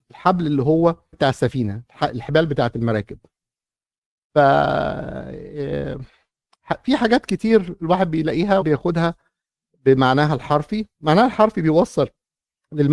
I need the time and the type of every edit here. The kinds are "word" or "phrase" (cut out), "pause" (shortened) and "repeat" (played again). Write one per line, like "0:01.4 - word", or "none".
0:01.1 - word
0:08.6 - word